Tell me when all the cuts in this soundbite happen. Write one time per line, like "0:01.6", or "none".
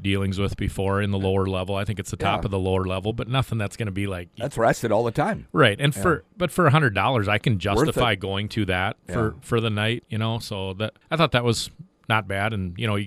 0:11.0